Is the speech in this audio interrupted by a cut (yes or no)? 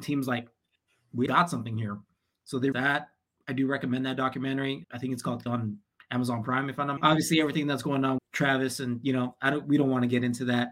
yes